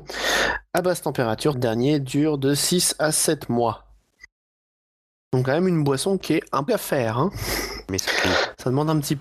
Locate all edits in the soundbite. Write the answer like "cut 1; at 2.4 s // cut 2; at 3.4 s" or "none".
cut 1; at 1.5 s // cut 2; at 5.4 s // cut 3; at 6.7 s // cut 4; at 8.1 s